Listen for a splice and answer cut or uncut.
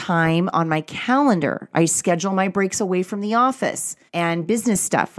cut